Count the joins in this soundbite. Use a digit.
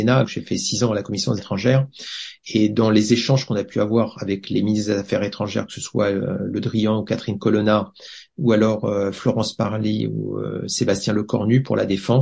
1